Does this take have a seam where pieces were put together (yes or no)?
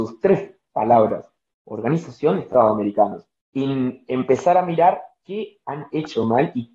no